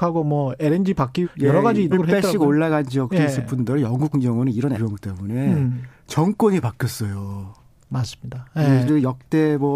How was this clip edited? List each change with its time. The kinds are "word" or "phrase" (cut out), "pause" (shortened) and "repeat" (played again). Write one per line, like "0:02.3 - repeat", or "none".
0:01.2 - word
0:01.9 - word
0:04.1 - word
0:04.7 - word
0:08.9 - word